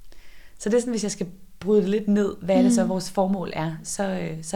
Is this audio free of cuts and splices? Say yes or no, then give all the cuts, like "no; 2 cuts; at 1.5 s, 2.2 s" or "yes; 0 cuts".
yes; 0 cuts